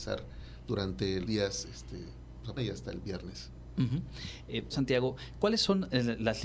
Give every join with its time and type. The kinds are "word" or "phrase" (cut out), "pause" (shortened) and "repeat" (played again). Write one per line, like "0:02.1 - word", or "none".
0:01.2 - phrase
0:02.6 - phrase
0:04.7 - word